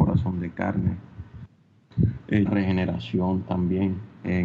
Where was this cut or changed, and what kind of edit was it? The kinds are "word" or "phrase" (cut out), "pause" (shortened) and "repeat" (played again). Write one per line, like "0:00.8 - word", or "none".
0:02.5 - phrase